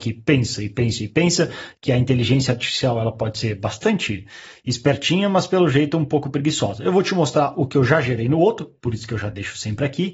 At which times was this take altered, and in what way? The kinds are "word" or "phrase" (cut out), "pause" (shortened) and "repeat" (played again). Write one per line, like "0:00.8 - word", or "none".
none